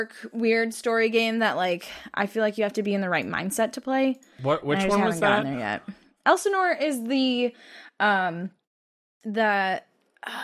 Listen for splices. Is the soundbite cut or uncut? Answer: uncut